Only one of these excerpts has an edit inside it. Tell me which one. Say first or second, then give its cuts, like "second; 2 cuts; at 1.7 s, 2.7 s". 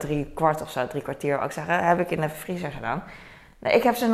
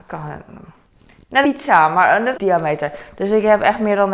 second; 2 cuts; at 1.4 s, 2.3 s